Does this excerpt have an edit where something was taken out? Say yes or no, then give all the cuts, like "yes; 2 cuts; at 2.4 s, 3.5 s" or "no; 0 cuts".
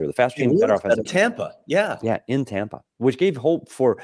yes; 1 cut; at 1.1 s